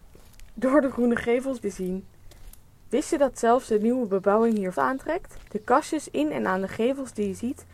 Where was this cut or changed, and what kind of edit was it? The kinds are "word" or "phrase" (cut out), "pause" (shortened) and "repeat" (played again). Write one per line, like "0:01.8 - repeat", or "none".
0:01.6 - phrase
0:04.8 - word
0:05.5 - pause